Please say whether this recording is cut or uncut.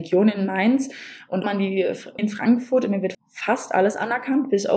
cut